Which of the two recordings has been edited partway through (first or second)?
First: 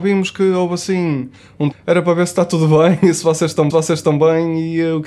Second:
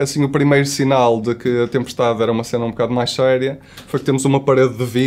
first